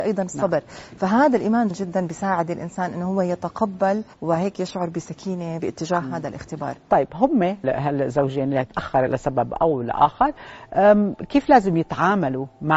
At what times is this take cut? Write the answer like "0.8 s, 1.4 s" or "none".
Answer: 1.7 s, 4.1 s, 5.6 s, 7.6 s, 9.1 s